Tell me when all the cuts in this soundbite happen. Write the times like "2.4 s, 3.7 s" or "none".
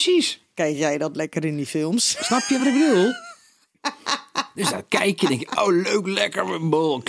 none